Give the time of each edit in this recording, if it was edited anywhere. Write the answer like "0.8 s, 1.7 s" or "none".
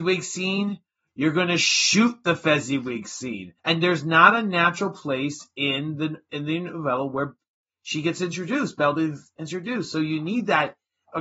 3.6 s